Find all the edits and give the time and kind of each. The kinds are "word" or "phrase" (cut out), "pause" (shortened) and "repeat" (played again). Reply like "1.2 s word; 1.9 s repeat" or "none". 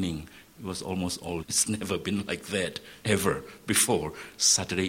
1.4 s word